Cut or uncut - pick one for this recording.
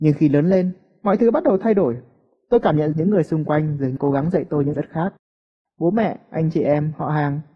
cut